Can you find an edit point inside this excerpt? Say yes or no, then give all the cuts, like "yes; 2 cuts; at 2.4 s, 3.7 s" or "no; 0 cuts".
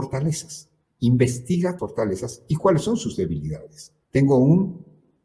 yes; 2 cuts; at 1.8 s, 4.0 s